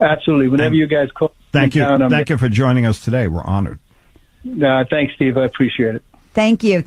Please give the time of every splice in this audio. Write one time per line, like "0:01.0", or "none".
none